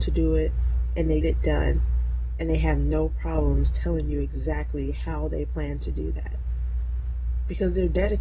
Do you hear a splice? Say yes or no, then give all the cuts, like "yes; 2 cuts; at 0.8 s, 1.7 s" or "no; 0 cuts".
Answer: yes; 1 cut; at 1.2 s